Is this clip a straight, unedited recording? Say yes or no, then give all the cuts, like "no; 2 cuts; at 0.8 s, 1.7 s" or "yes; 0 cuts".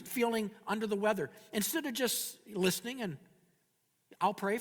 yes; 0 cuts